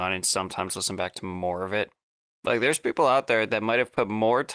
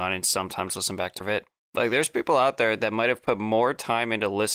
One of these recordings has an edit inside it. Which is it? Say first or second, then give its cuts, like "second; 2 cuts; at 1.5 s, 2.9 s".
second; 2 cuts; at 1.2 s, 1.6 s